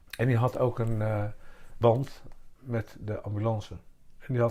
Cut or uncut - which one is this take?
cut